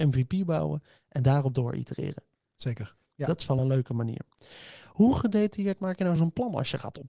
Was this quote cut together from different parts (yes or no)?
no